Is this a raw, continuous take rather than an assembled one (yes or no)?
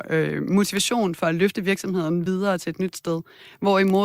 yes